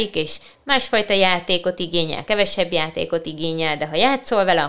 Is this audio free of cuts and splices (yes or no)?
yes